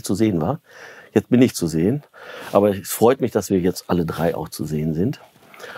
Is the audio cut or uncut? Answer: uncut